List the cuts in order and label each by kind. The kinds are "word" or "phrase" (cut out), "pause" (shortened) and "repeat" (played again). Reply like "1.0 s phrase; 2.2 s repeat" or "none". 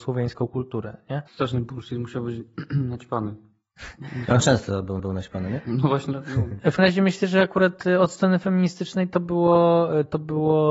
1.3 s pause; 4.4 s word; 5.0 s repeat; 6.8 s word